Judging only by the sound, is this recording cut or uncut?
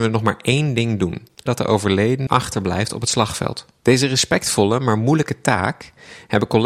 cut